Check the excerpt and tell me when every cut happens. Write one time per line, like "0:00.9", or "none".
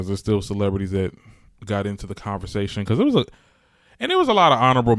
none

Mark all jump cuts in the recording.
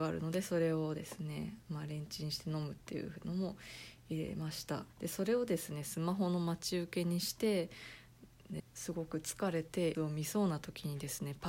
0:04.9
0:08.6
0:09.9

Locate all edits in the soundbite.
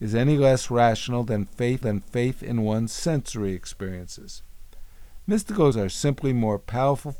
0:01.8
0:05.7

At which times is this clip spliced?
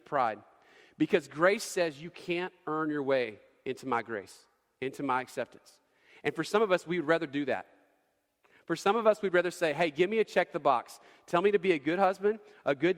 none

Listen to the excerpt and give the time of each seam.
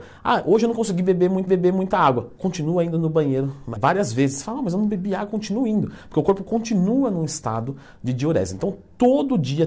0:01.5
0:03.8

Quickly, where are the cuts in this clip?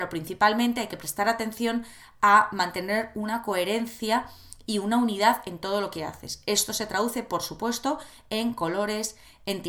none

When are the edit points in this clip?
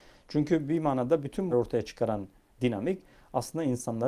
0:01.5

